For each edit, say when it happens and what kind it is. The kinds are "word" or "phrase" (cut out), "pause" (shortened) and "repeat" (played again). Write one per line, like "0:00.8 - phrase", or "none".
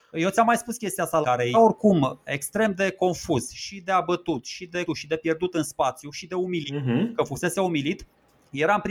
0:01.2 - phrase
0:01.5 - word
0:04.8 - phrase